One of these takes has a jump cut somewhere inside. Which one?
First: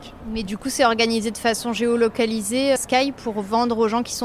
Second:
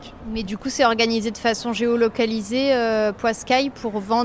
first; 1 cut; at 2.8 s

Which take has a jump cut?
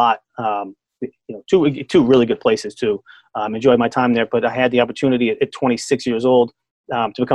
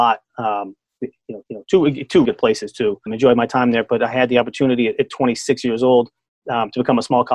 second; 3 cuts; at 1.4 s, 2.2 s, 3.1 s

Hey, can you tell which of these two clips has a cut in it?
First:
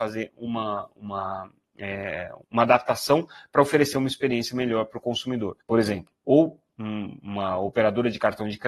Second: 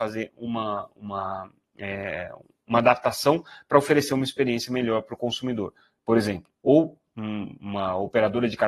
first; 2 cuts; at 2.4 s, 5.6 s

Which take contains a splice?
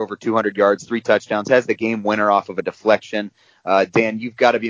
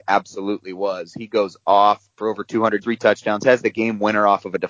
second; 2 cuts; at 2.1 s, 2.8 s

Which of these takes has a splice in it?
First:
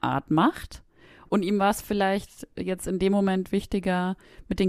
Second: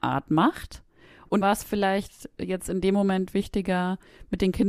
second; 1 cut; at 1.4 s

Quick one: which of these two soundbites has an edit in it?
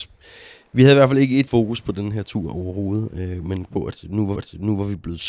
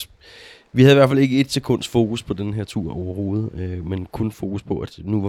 first; 3 cuts; at 1.5 s, 3.7 s, 4.4 s

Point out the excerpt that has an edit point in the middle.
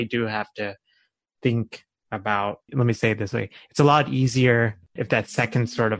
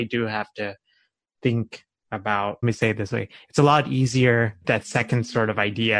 second; 2 cuts; at 2.6 s, 4.6 s

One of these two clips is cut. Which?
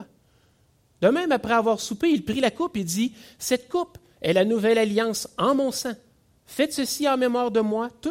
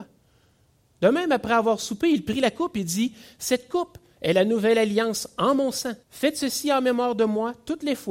second; 1 cut; at 6.0 s

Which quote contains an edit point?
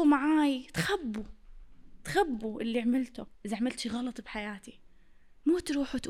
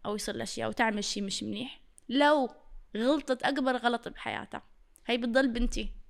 first; 1 cut; at 3.3 s

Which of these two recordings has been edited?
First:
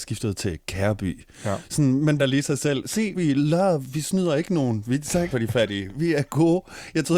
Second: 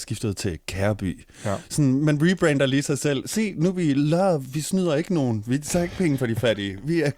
first; 3 cuts; at 2.2 s, 3.1 s, 5.3 s

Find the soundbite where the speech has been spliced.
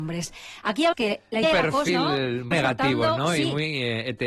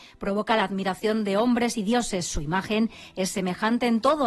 first; 4 cuts; at 0.9 s, 1.4 s, 1.9 s, 2.5 s

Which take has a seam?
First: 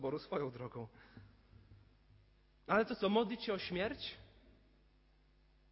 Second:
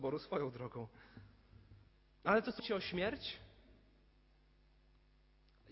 second; 2 cuts; at 1.9 s, 2.6 s

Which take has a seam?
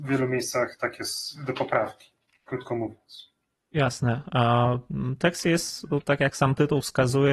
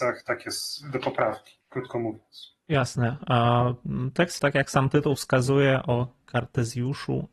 second; 3 cuts; at 1.6 s, 2.6 s, 4.4 s

